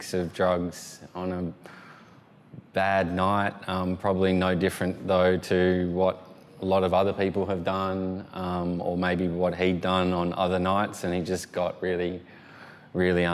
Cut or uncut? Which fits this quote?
cut